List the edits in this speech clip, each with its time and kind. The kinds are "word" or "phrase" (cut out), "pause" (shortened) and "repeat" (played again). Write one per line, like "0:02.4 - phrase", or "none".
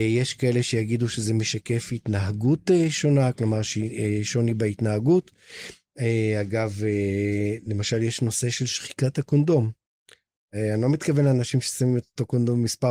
none